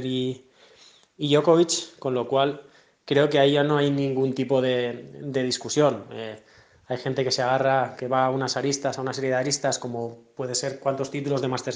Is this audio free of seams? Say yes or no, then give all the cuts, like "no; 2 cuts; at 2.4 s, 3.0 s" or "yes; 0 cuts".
no; 1 cut; at 7.9 s